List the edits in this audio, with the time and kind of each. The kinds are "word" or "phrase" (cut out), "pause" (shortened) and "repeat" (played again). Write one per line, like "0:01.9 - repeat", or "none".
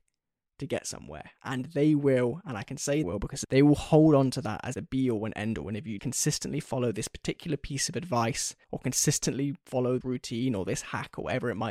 0:03.0 - word
0:03.4 - phrase
0:04.7 - phrase
0:06.0 - word
0:08.6 - pause
0:10.0 - word